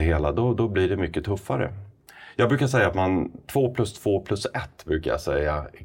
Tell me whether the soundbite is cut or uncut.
uncut